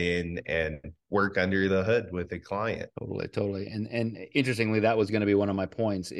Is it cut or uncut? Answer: cut